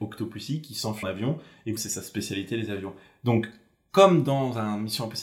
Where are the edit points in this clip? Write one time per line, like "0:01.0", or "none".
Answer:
0:01.0
0:01.8